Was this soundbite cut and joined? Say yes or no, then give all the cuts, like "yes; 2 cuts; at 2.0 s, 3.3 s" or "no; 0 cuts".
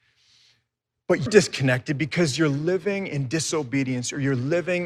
yes; 1 cut; at 1.3 s